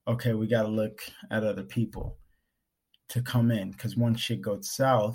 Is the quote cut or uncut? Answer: uncut